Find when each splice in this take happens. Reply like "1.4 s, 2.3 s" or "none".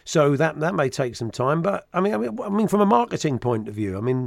none